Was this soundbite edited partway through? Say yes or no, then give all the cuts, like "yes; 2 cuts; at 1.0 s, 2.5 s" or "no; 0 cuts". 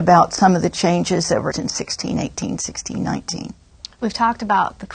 yes; 1 cut; at 1.5 s